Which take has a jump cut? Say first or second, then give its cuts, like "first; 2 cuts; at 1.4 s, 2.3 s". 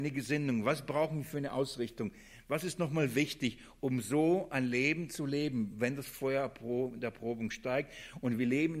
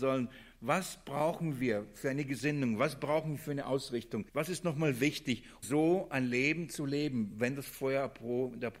second; 2 cuts; at 4.3 s, 5.6 s